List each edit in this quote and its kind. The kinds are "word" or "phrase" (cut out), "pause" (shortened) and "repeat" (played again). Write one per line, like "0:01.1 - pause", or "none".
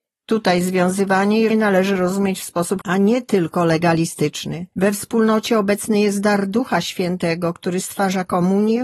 0:01.5 - word
0:02.8 - word
0:04.7 - pause

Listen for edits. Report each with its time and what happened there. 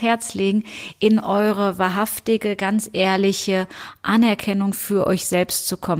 none

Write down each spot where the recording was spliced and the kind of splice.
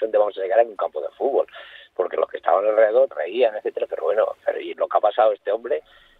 0:03.1 - word
0:04.7 - word

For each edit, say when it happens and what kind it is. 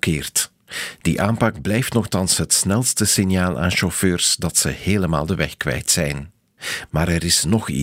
none

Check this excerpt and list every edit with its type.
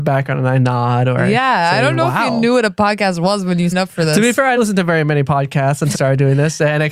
0:03.7 - word
0:04.6 - word
0:05.9 - word

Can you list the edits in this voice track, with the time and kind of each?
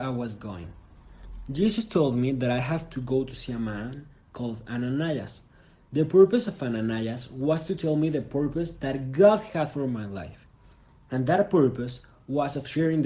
none

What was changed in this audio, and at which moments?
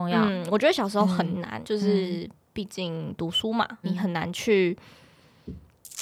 0:01.6 - word
0:03.8 - word

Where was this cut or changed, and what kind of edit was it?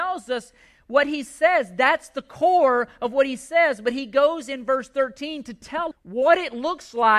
0:05.9 - word

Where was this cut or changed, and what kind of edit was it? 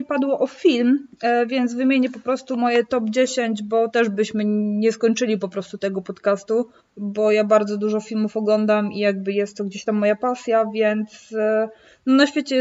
0:06.8 - pause

